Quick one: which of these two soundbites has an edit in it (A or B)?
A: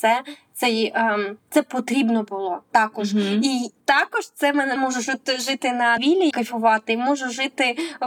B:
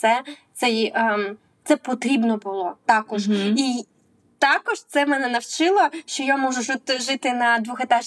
A